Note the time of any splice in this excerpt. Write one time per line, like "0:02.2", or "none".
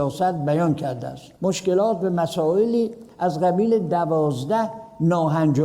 0:01.4